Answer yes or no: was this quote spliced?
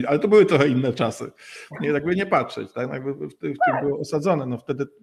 no